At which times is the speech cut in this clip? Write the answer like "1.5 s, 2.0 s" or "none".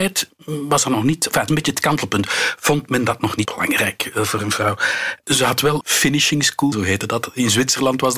1.5 s, 3.5 s, 5.8 s, 6.7 s